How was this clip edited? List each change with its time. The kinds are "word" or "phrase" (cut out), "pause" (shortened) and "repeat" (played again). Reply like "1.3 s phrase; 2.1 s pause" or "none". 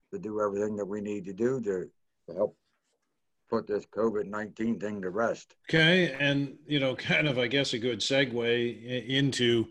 5.6 s pause

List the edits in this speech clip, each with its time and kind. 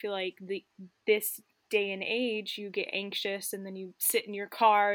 none

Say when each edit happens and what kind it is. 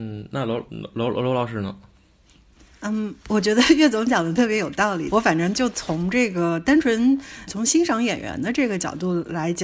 7.5 s word

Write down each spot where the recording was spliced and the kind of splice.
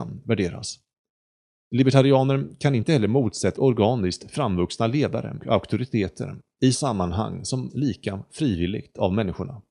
3.6 s word; 5.4 s word; 6.7 s word; 7.7 s word

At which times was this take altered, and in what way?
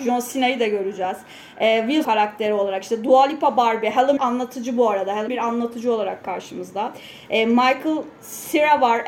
2.0 s phrase; 4.2 s word; 5.3 s word

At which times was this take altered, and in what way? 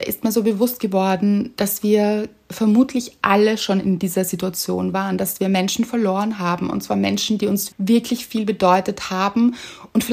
7.7 s word

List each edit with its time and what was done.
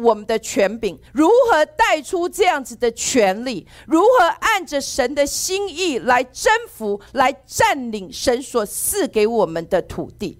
1.1 s pause

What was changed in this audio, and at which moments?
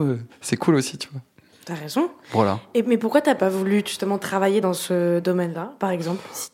none

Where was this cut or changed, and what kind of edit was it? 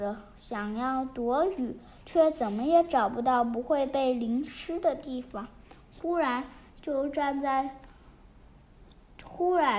none

